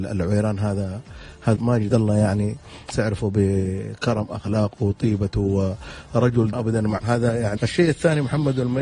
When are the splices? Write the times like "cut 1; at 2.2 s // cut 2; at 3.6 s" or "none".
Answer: cut 1; at 1.6 s // cut 2; at 1.9 s // cut 3; at 2.9 s // cut 4; at 6.5 s // cut 5; at 7.0 s // cut 6; at 7.6 s